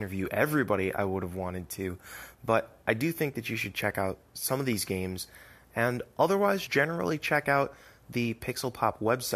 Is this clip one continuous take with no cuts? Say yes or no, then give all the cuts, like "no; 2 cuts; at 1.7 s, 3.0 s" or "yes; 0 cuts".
no; 1 cut; at 6.7 s